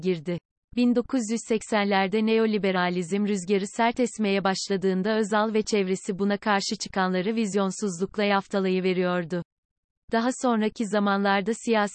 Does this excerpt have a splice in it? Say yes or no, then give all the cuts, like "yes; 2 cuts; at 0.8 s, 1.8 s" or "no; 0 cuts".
no; 0 cuts